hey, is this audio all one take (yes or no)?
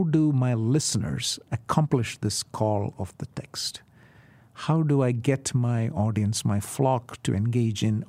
yes